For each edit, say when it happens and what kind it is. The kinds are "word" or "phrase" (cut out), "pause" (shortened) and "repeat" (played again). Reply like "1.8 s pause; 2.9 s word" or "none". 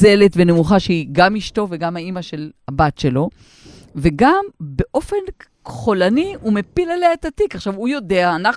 none